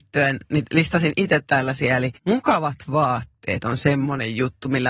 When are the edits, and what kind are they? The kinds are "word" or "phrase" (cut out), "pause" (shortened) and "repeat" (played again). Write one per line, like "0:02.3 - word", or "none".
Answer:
0:02.2 - pause